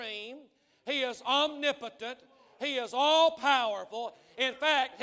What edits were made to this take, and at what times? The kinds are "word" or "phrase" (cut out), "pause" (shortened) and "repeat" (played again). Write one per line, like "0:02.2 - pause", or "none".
none